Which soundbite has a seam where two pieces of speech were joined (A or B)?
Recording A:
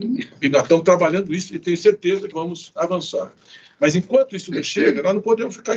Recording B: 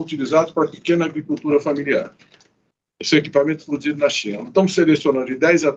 A